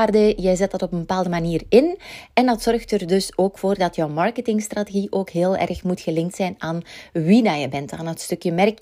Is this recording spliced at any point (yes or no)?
no